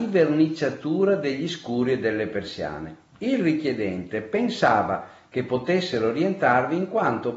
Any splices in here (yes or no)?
no